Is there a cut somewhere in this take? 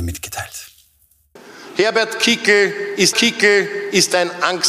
yes; 1 cut; at 3.1 s

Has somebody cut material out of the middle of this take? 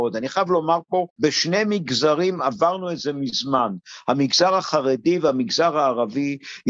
no; 0 cuts

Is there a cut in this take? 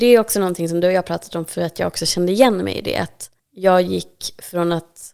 yes; 1 cut; at 3.4 s

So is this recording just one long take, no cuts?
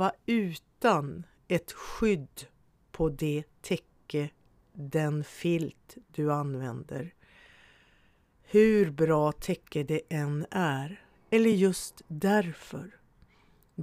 yes; 0 cuts

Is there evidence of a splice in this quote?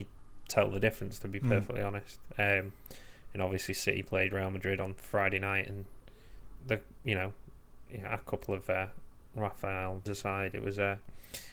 yes; 2 cuts; at 6.6 s, 10.1 s

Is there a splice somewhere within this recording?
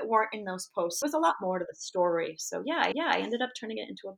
yes; 2 cuts; at 1.0 s, 2.9 s

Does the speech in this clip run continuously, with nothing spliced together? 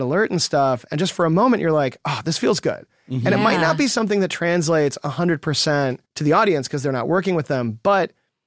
no; 1 cut; at 6.1 s

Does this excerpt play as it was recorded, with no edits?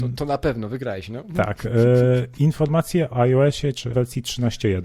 no; 2 cuts; at 3.1 s, 3.9 s

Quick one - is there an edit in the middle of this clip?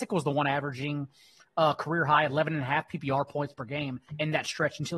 no; 0 cuts

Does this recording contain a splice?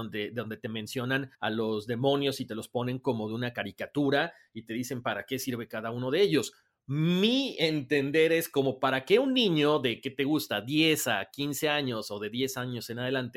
yes; 1 cut; at 1.3 s

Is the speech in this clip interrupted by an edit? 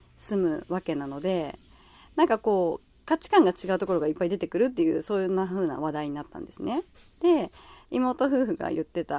no; 0 cuts

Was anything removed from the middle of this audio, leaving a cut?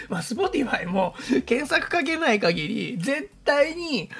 no; 0 cuts

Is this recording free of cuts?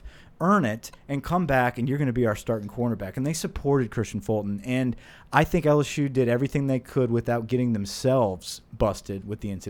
yes; 0 cuts

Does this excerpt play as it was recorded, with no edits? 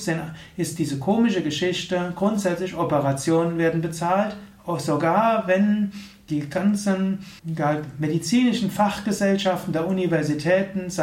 no; 1 cut; at 7.4 s

